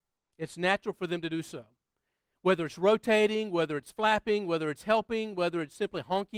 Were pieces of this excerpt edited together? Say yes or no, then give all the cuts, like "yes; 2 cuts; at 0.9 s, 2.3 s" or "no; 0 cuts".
no; 0 cuts